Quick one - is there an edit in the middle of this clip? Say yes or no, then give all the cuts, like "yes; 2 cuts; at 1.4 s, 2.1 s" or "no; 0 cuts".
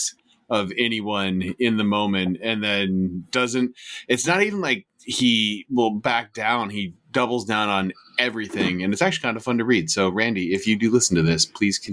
no; 0 cuts